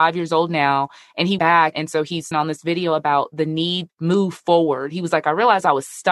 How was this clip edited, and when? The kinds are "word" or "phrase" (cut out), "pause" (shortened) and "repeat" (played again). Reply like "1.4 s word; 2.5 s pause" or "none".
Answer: 1.4 s word; 1.7 s word; 2.3 s word; 3.9 s word